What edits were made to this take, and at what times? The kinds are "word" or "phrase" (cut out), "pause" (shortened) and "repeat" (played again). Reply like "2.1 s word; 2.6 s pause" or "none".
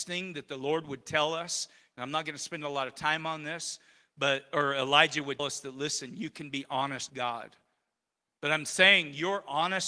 5.4 s word; 7.1 s word

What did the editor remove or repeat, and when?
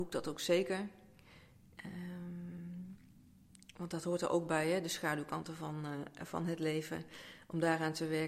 none

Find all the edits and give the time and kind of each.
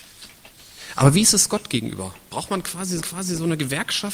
3.0 s repeat

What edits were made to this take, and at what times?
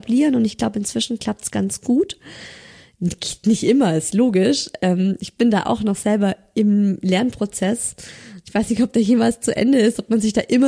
none

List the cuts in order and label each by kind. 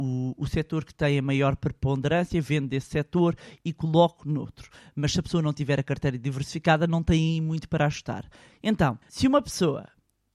4.8 s pause; 9.0 s pause

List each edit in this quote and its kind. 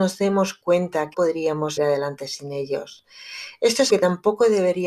1.1 s word; 1.8 s word; 3.9 s word

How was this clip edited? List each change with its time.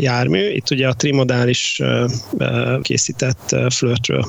2.8 s word

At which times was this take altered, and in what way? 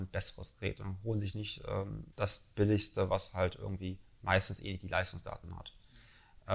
2.1 s pause

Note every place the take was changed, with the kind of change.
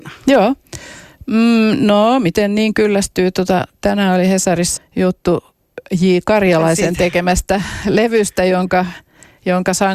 4.8 s word

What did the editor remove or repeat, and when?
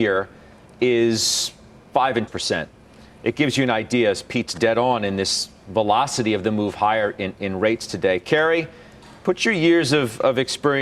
2.3 s phrase

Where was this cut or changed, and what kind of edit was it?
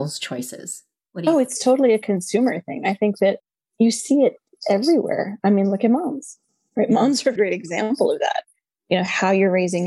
7.4 s word

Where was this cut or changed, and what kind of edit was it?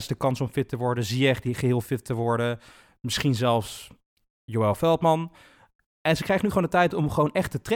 none

